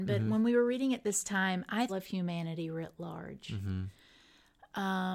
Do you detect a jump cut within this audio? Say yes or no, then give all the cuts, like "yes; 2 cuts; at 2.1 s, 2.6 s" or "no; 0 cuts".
yes; 1 cut; at 1.9 s